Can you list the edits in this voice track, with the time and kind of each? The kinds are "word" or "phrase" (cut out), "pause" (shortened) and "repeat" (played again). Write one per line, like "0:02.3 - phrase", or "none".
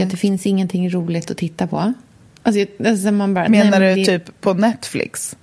none